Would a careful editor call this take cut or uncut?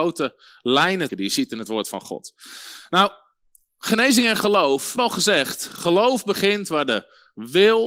cut